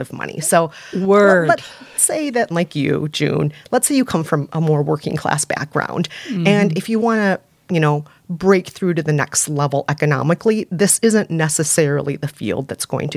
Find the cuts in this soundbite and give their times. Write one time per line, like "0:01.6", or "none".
0:02.0
0:02.5